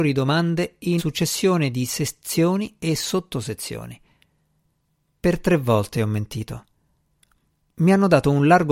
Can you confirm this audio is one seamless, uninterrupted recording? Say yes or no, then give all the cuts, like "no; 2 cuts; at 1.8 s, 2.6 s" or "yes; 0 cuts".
no; 1 cut; at 1.0 s